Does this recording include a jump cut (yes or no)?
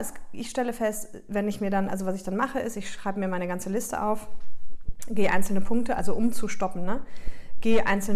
no